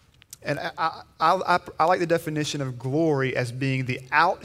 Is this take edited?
no; 0 cuts

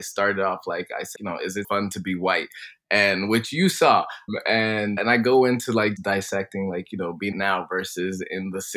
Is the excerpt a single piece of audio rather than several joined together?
no; 6 cuts; at 1.2 s, 1.6 s, 4.3 s, 5.0 s, 6.0 s, 7.3 s

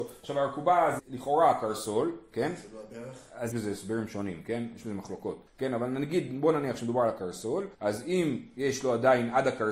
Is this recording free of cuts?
no; 4 cuts; at 1.0 s, 3.5 s, 5.5 s, 7.7 s

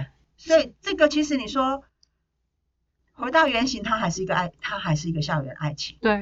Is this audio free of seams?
yes; 0 cuts

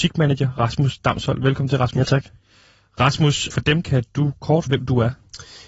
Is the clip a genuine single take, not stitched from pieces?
no; 3 cuts; at 3.5 s, 3.8 s, 4.7 s

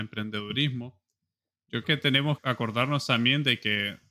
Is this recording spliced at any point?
yes; 2 cuts; at 1.8 s, 2.4 s

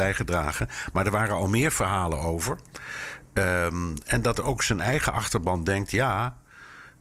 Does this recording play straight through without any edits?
yes; 0 cuts

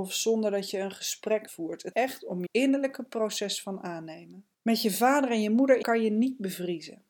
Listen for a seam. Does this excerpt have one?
yes; 5 cuts; at 1.5 s, 1.9 s, 2.5 s, 4.5 s, 5.8 s

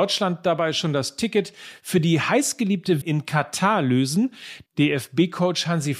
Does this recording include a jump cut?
yes; 1 cut; at 3.0 s

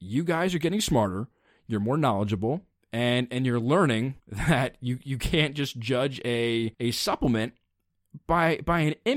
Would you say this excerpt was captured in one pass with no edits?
no; 2 cuts; at 4.2 s, 6.7 s

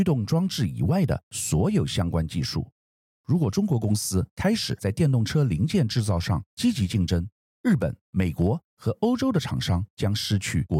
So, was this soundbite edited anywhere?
yes; 3 cuts; at 3.0 s, 7.3 s, 8.0 s

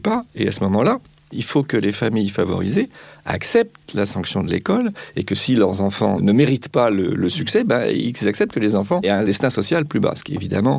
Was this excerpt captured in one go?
yes; 0 cuts

